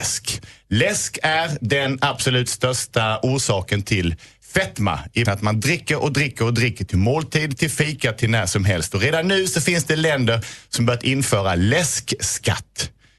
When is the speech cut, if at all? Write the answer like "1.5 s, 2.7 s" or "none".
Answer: 5.3 s